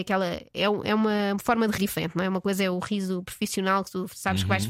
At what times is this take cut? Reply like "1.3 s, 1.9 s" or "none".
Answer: 1.8 s